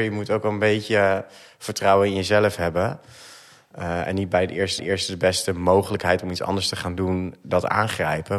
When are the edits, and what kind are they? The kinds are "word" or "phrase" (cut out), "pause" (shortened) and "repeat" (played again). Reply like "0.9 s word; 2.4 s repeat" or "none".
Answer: 4.8 s repeat